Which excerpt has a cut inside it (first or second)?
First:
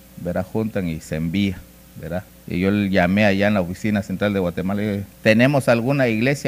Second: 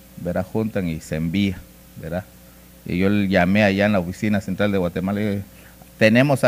first